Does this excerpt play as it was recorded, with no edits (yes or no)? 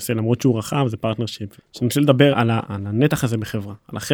no